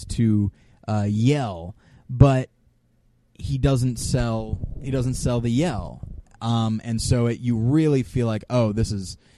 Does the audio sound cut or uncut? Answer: uncut